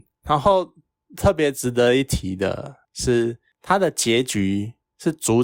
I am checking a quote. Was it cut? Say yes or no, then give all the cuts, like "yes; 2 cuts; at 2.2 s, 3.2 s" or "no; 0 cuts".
yes; 1 cut; at 2.8 s